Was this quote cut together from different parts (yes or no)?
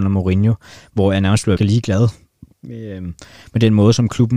yes